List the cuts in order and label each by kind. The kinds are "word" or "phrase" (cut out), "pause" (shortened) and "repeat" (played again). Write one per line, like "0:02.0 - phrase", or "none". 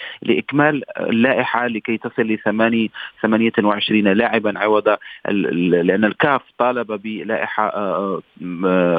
none